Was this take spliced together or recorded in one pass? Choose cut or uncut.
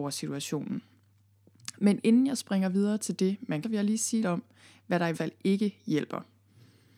cut